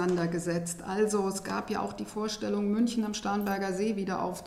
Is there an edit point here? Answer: no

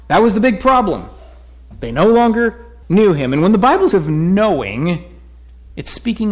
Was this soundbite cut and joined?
yes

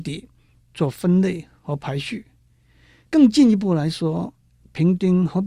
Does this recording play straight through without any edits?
yes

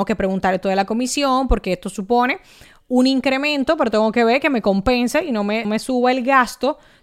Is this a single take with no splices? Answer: no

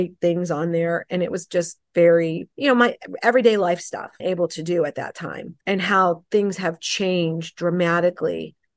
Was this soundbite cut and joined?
yes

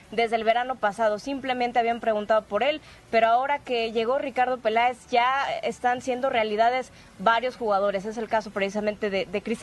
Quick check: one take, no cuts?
yes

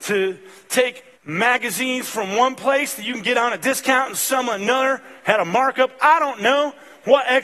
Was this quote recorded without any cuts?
no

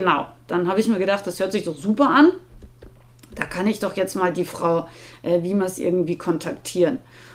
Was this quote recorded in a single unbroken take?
yes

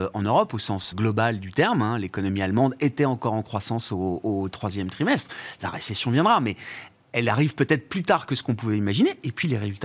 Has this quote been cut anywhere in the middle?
yes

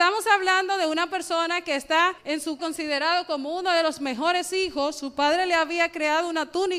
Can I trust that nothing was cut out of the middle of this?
no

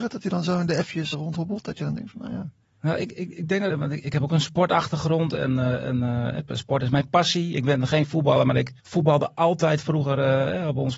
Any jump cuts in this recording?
yes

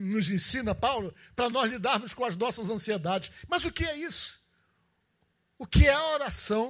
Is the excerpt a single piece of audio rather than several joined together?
yes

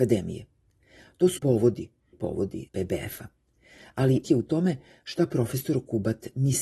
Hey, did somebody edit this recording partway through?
yes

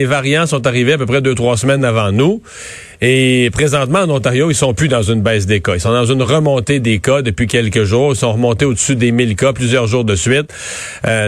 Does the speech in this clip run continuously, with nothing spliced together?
yes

